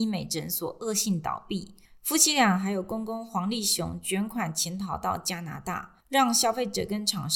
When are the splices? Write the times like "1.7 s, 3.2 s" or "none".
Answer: 1.8 s, 6.0 s

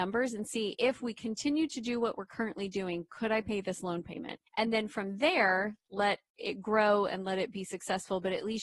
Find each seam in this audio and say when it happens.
4.5 s

